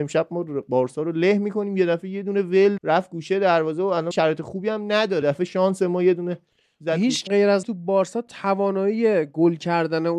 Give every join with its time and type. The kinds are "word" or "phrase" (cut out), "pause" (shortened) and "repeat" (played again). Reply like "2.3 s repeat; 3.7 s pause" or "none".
2.8 s word; 4.1 s word; 5.2 s word; 7.3 s word; 7.6 s word